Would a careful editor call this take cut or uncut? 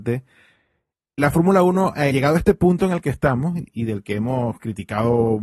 cut